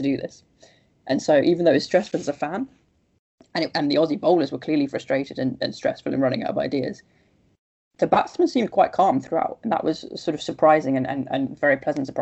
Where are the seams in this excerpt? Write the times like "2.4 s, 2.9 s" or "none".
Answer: none

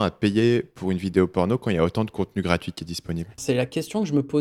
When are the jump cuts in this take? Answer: 3.4 s

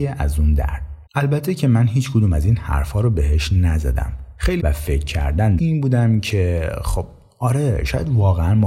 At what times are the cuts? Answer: 1.1 s, 4.6 s, 5.6 s

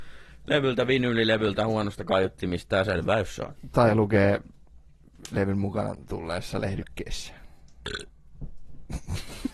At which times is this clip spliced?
none

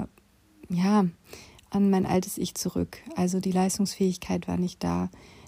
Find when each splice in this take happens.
none

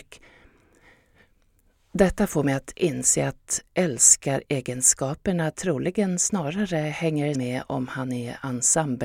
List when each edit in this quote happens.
7.3 s

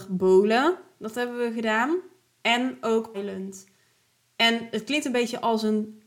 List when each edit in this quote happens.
3.1 s

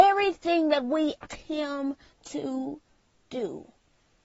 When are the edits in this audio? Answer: 1.3 s

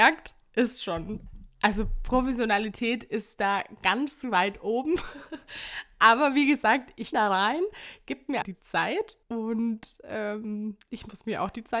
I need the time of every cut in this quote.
7.1 s, 8.4 s, 9.2 s

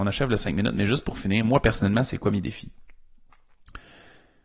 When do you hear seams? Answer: none

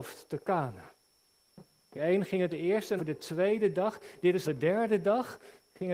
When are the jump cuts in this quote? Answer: 1.9 s, 2.5 s, 3.0 s, 4.4 s

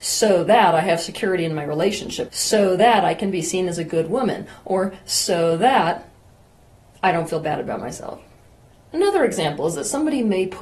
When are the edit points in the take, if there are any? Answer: 2.3 s

